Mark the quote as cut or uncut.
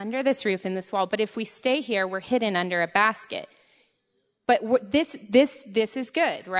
uncut